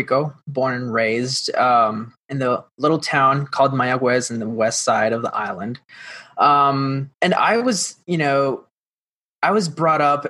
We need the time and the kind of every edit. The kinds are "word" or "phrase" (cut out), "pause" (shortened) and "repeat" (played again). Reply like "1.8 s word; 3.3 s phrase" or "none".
2.2 s pause; 7.1 s pause